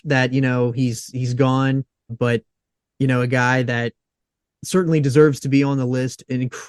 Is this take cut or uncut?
cut